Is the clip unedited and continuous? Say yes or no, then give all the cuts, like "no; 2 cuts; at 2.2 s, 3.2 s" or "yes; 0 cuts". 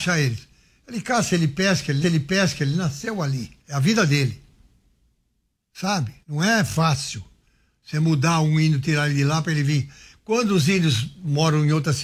no; 3 cuts; at 2.0 s, 3.6 s, 6.2 s